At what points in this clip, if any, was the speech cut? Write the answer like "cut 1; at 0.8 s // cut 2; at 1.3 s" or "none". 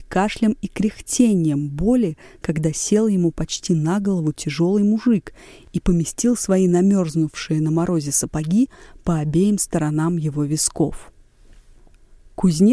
none